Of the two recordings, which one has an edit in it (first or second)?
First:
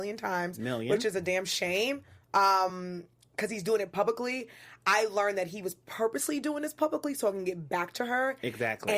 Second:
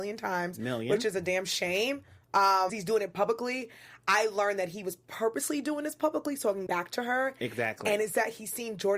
second